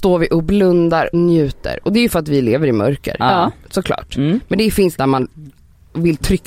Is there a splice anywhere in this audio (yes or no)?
yes